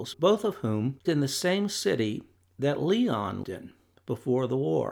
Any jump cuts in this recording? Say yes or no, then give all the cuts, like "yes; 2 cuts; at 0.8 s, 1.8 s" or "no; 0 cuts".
yes; 2 cuts; at 1.0 s, 3.4 s